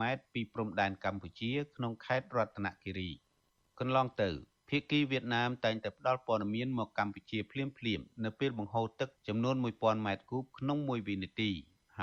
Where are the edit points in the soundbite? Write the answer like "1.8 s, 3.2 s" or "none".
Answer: none